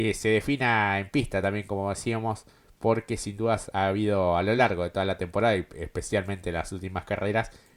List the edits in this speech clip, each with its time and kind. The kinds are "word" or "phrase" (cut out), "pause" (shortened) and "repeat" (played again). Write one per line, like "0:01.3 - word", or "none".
none